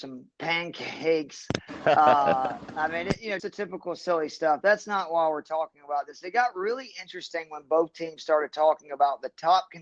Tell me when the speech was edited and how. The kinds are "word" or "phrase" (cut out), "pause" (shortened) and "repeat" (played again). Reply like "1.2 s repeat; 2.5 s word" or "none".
3.4 s word